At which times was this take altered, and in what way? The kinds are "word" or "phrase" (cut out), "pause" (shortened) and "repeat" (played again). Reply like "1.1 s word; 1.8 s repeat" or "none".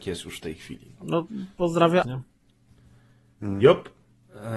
2.0 s word